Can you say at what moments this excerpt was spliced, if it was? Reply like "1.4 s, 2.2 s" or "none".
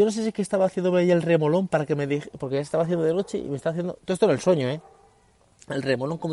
none

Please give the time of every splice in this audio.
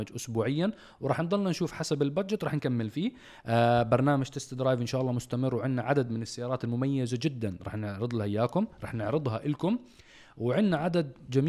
none

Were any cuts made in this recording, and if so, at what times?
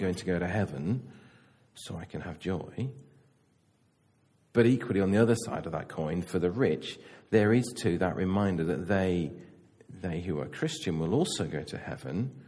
none

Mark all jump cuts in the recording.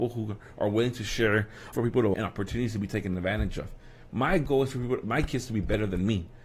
1.7 s, 2.1 s

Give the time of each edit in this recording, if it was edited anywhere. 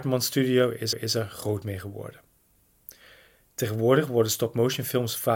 0.9 s

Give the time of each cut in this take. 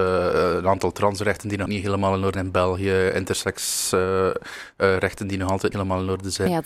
1.7 s, 2.3 s, 5.7 s

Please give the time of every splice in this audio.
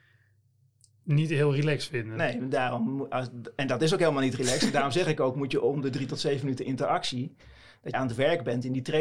7.9 s

